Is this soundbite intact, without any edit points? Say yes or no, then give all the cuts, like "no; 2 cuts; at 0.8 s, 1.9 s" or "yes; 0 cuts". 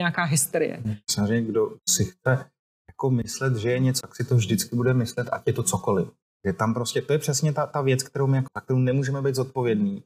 no; 2 cuts; at 4.0 s, 8.5 s